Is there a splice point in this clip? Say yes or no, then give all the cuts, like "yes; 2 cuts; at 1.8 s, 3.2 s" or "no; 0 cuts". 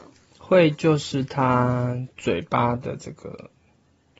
yes; 1 cut; at 2.1 s